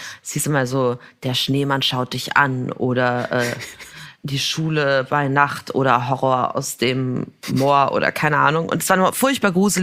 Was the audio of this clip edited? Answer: yes; 1 cut; at 4.1 s

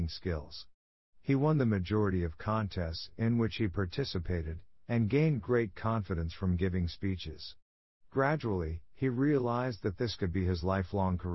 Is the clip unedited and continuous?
yes; 0 cuts

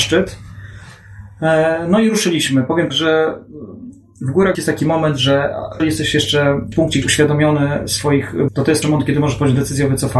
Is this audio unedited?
no; 7 cuts; at 2.9 s, 4.5 s, 5.8 s, 6.7 s, 7.0 s, 8.5 s, 8.8 s

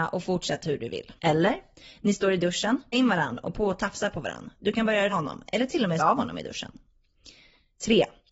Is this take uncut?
no; 5 cuts; at 1.2 s, 2.9 s, 3.5 s, 5.1 s, 6.0 s

